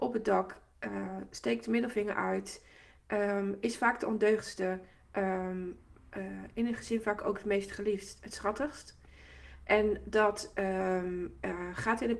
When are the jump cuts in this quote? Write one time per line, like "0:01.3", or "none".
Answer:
none